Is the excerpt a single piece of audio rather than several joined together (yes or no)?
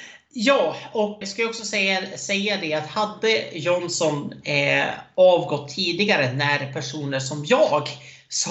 no